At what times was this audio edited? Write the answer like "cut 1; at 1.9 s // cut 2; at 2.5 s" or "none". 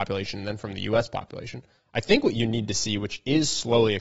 none